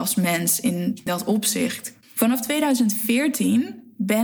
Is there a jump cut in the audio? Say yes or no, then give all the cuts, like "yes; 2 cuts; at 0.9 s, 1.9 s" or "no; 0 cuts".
yes; 2 cuts; at 1.1 s, 2.0 s